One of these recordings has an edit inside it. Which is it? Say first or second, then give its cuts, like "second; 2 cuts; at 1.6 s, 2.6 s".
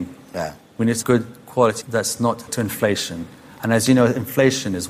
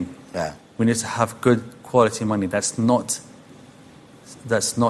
first; 4 cuts; at 1.0 s, 1.8 s, 2.5 s, 3.4 s